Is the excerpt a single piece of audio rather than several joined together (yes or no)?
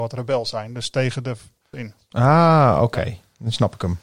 no